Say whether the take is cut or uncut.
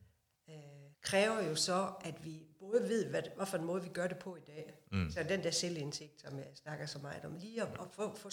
cut